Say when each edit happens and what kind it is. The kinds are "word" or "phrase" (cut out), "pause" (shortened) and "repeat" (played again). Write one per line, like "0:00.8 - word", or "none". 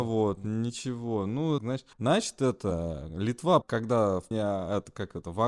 0:01.6 - word
0:01.9 - pause
0:03.6 - word
0:04.3 - word